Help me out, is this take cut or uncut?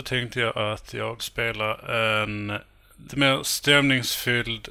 cut